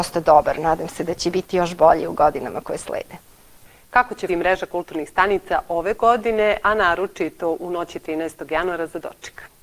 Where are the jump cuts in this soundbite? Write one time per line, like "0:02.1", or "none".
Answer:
0:04.3

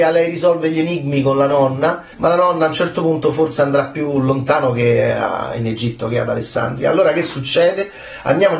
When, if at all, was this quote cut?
0:02.1

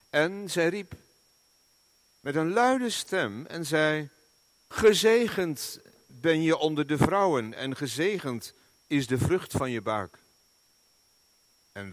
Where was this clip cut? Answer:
none

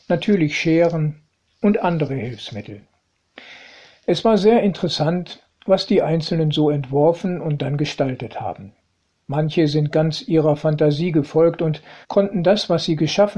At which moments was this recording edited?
0:12.0

